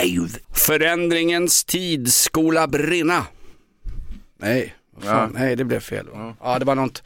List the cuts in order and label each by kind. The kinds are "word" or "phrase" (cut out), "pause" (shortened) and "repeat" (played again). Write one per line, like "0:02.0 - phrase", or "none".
none